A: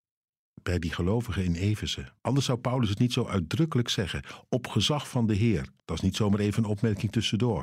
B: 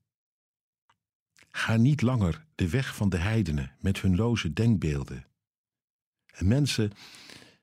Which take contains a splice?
A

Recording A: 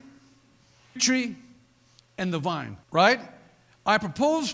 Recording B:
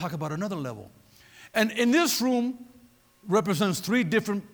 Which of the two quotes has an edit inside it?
A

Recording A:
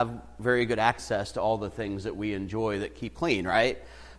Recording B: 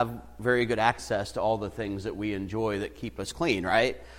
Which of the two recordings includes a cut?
A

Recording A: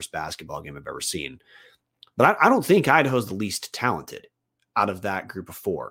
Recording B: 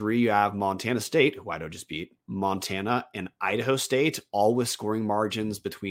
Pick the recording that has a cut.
B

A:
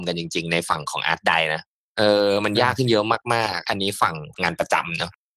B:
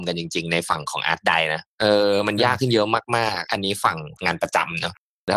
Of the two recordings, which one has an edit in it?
B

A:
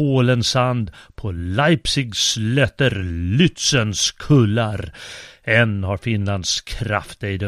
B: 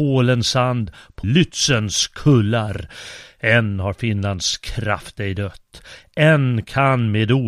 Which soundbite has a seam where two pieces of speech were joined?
B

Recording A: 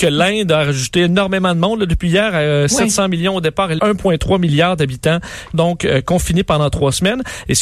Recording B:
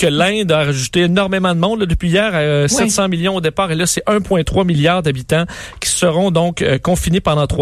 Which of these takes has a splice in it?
A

